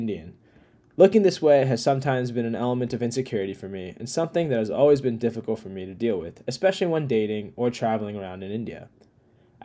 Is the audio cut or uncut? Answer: uncut